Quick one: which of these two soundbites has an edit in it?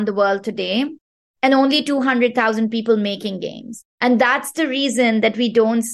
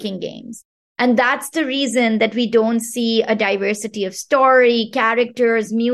first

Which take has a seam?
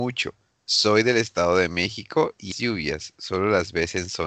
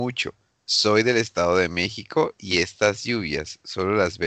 first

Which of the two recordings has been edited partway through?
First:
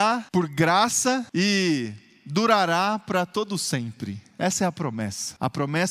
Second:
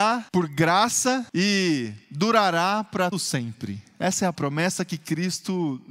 second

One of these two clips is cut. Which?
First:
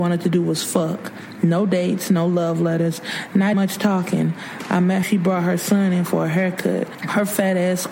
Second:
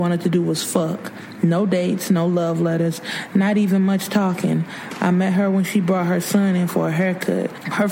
first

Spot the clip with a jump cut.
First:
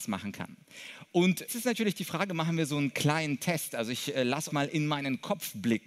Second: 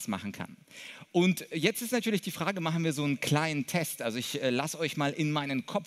first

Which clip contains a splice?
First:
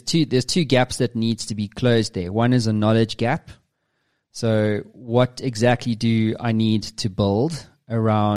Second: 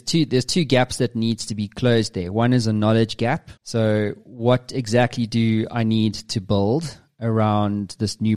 second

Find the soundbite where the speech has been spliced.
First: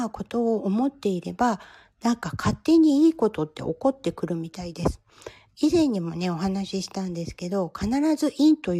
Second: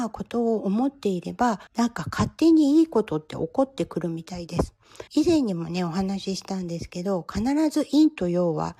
second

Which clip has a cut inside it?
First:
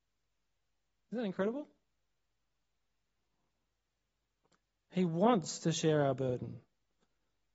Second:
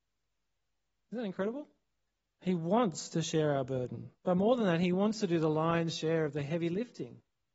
second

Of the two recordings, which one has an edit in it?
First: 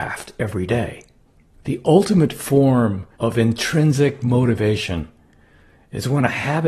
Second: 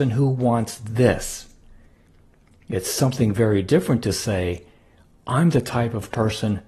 first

